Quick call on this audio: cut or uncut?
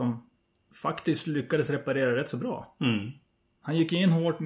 uncut